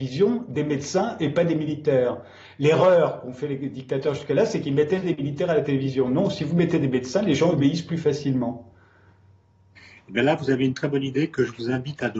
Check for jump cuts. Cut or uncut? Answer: uncut